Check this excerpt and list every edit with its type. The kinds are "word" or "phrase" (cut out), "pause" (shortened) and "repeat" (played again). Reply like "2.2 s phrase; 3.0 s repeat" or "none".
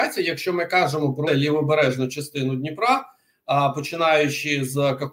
1.3 s word

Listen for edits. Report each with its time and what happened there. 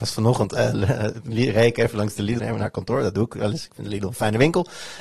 2.4 s phrase

